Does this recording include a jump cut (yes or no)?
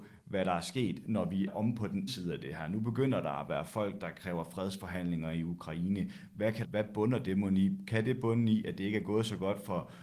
yes